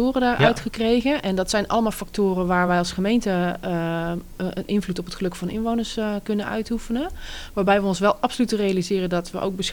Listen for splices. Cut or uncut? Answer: uncut